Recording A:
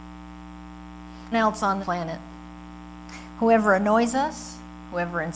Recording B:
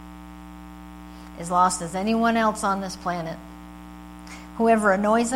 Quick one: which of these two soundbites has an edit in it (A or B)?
A